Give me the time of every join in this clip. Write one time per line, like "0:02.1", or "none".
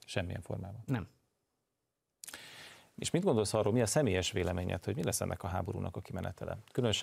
none